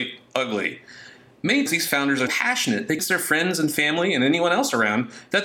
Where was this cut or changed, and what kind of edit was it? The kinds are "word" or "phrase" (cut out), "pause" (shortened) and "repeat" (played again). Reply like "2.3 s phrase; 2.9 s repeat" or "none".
1.7 s word; 2.3 s word; 3.0 s word